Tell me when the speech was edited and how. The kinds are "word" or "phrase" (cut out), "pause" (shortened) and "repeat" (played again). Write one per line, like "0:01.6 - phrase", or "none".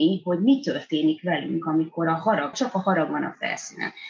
0:02.5 - word